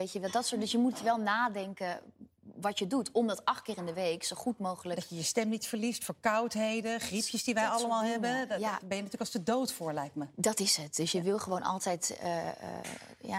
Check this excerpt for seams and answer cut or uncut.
uncut